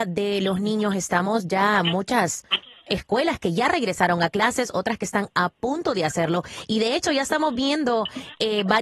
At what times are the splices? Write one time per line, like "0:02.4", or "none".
none